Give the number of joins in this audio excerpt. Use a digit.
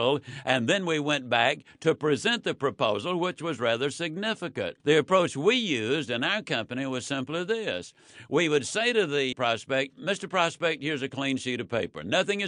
2